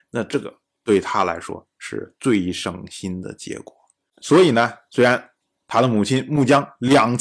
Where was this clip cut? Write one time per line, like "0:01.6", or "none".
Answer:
none